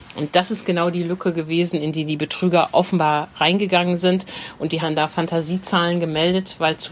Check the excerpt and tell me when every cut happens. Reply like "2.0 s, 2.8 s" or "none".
4.8 s